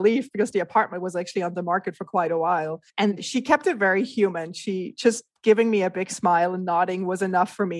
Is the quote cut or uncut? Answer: cut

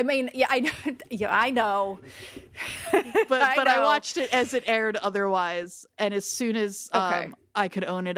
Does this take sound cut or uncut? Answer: uncut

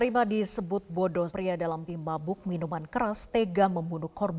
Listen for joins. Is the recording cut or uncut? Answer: cut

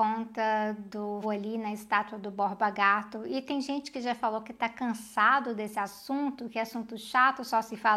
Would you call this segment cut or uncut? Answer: cut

